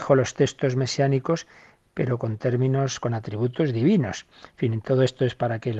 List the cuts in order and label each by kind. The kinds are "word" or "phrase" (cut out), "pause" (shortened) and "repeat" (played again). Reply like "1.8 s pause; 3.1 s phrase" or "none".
none